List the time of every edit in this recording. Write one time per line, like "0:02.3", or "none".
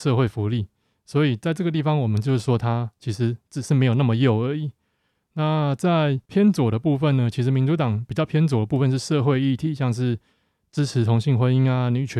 0:06.2